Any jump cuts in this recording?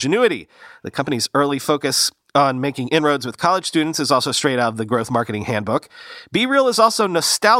no; 0 cuts

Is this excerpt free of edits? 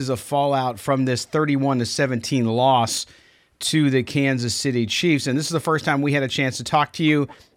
yes; 0 cuts

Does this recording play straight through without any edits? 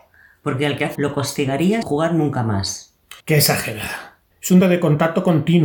no; 5 cuts; at 0.9 s, 1.8 s, 3.2 s, 4.3 s, 4.6 s

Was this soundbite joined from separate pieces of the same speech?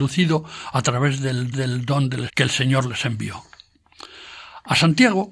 yes; 2 cuts; at 1.5 s, 2.3 s

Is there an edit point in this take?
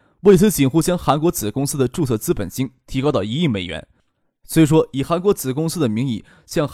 no; 0 cuts

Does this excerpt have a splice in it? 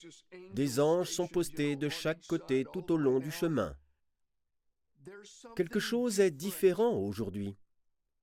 no; 0 cuts

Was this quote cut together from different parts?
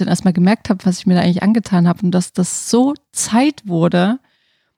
no; 0 cuts

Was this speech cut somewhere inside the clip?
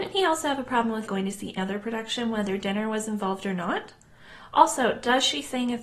yes; 2 cuts; at 1.1 s, 1.6 s

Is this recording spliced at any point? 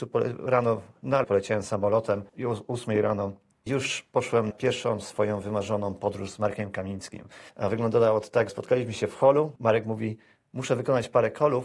yes; 7 cuts; at 1.2 s, 2.3 s, 3.7 s, 4.5 s, 7.5 s, 8.5 s, 9.6 s

